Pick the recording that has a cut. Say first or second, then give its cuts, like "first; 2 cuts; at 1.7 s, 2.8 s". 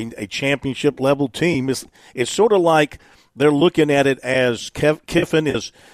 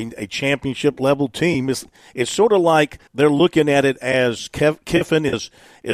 second; 1 cut; at 3.1 s